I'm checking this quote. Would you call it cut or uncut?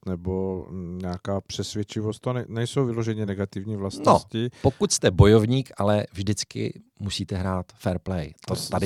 uncut